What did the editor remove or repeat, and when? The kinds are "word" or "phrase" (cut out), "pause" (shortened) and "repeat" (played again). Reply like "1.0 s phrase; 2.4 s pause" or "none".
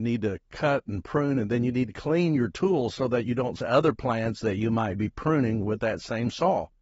3.6 s phrase